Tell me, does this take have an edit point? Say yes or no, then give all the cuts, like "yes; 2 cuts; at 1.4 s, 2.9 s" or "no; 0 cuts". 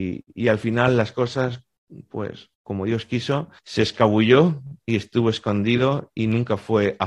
yes; 2 cuts; at 2.5 s, 3.6 s